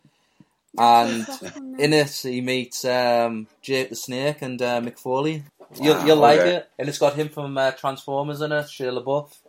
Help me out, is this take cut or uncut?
cut